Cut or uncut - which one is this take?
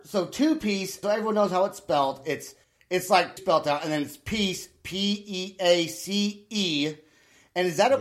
cut